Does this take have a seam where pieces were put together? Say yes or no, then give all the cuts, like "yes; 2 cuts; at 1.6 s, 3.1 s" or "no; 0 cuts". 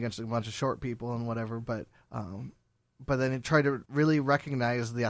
yes; 2 cuts; at 2.0 s, 3.9 s